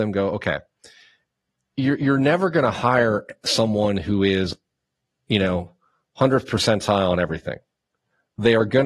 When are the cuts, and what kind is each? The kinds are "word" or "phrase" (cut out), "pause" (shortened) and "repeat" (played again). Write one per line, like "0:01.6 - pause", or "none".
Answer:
none